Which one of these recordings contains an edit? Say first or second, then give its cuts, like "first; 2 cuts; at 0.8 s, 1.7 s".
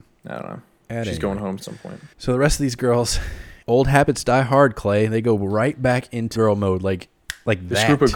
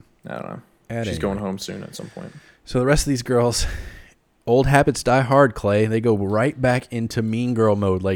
first; 4 cuts; at 1.6 s, 2.1 s, 3.6 s, 6.4 s